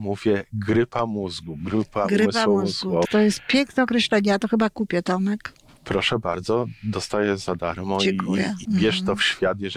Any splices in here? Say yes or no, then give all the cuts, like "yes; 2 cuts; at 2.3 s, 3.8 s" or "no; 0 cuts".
yes; 2 cuts; at 3.0 s, 8.6 s